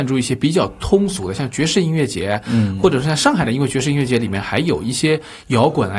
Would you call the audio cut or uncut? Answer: uncut